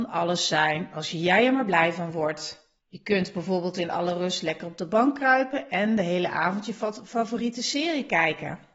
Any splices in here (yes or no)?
yes